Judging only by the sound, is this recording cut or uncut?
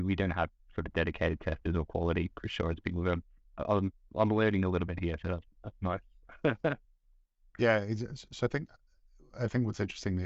uncut